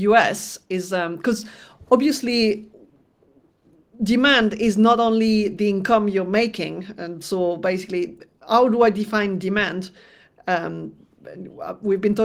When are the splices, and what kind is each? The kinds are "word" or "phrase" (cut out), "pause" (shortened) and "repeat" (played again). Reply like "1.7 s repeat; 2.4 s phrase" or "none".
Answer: none